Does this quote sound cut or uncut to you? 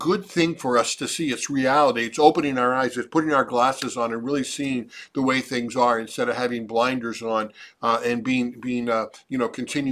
uncut